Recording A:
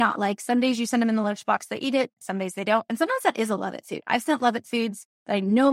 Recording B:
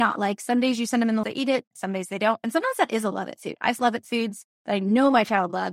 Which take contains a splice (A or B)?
B